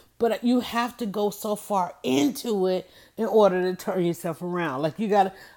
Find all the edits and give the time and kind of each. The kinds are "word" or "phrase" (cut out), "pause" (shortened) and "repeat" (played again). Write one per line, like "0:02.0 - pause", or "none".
none